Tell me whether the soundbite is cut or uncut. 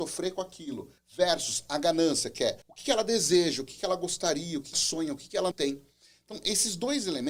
cut